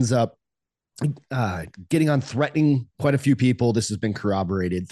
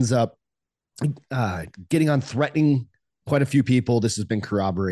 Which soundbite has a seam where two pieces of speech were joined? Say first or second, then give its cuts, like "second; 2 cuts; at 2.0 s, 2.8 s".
first; 1 cut; at 2.9 s